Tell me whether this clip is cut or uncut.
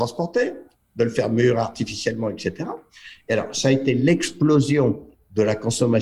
uncut